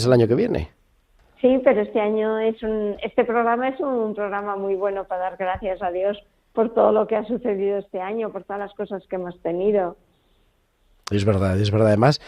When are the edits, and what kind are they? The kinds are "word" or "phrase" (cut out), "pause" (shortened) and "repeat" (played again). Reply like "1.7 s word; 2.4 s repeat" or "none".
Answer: none